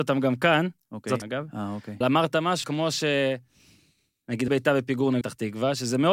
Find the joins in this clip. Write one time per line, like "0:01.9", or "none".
0:01.2
0:02.0
0:02.6
0:04.5
0:05.2